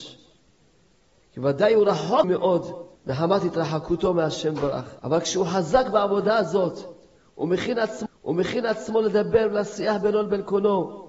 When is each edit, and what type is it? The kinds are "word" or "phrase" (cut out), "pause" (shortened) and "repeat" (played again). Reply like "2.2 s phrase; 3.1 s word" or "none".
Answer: 2.2 s word; 3.0 s pause; 5.0 s pause; 8.1 s repeat